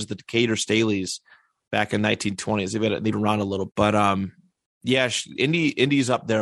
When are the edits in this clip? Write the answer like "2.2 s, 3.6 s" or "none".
3.1 s, 3.7 s